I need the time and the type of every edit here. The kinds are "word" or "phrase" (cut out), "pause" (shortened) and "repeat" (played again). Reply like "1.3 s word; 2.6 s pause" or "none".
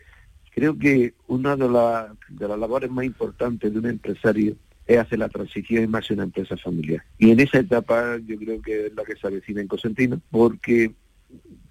4.6 s pause; 7.1 s pause; 10.3 s pause